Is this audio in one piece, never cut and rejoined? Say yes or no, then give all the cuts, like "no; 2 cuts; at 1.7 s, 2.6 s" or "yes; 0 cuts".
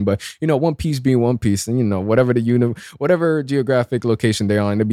yes; 0 cuts